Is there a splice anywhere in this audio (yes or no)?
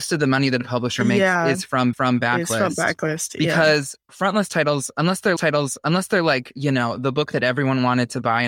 yes